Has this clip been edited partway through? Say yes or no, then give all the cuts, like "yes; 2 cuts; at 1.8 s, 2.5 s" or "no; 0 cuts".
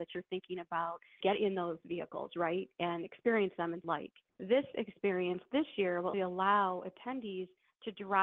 yes; 4 cuts; at 1.2 s, 3.8 s, 4.3 s, 6.1 s